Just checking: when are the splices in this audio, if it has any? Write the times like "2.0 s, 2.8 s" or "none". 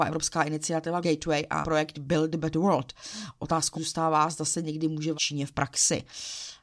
1.0 s, 1.6 s, 3.7 s, 5.1 s